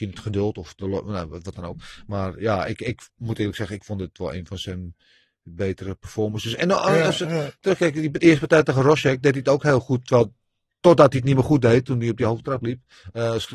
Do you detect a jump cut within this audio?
no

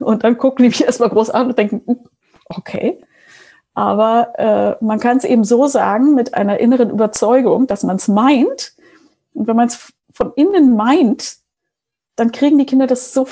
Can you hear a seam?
no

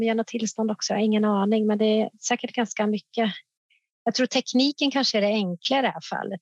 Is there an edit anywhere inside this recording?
no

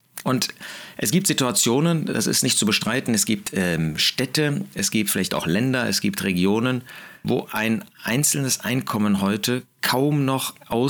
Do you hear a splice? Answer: yes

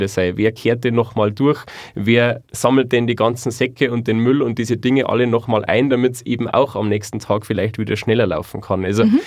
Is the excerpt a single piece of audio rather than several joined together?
yes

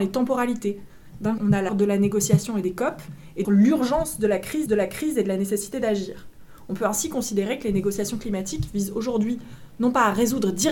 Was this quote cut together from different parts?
yes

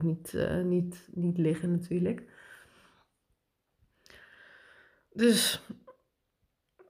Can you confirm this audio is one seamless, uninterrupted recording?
yes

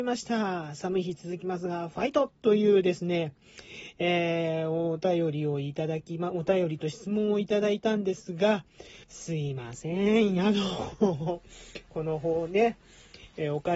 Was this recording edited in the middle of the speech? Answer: yes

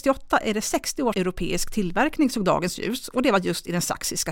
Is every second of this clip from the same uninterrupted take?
no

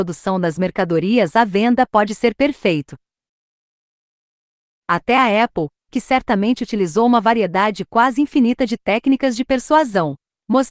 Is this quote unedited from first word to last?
yes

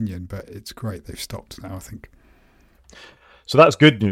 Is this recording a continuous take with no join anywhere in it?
yes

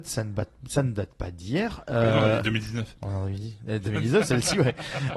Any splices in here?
no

